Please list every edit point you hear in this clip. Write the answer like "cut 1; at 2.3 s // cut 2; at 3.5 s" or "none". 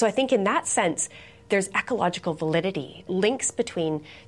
cut 1; at 3.1 s